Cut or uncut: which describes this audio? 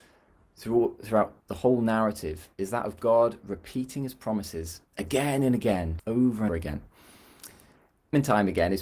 cut